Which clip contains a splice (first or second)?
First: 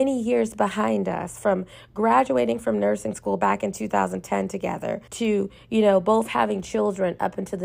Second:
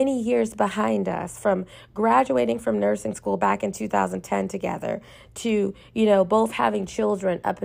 first